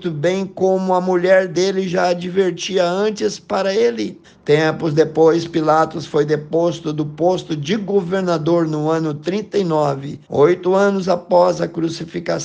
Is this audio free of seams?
no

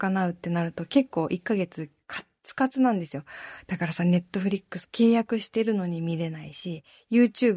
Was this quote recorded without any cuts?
no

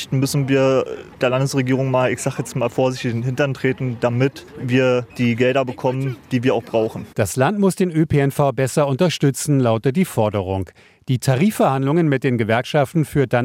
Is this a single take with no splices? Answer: yes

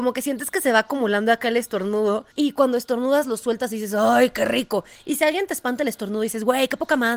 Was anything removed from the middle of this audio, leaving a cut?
yes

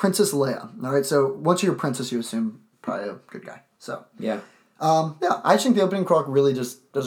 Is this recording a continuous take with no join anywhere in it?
yes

